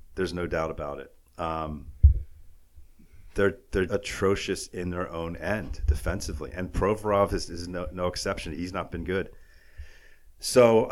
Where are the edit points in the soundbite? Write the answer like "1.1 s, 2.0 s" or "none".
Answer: 3.9 s

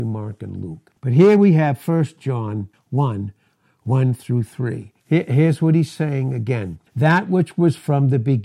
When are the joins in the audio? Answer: 1.0 s, 2.7 s, 5.0 s, 6.9 s

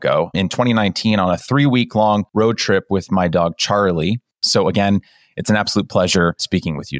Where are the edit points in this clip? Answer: none

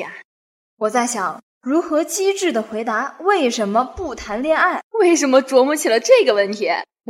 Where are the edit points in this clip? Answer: 4.9 s

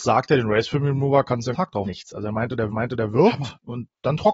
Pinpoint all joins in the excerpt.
1.5 s, 1.9 s, 2.7 s

